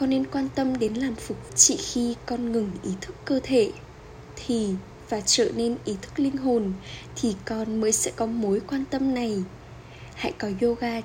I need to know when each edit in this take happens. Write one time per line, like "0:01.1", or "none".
0:01.5